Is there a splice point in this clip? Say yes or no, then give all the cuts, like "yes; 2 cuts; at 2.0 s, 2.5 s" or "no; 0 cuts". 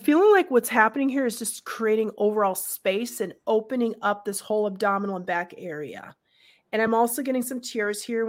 no; 0 cuts